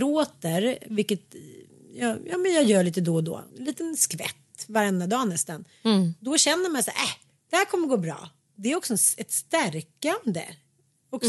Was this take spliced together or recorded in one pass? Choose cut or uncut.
cut